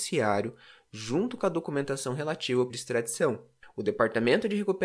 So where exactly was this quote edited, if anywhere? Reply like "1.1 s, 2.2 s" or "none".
2.7 s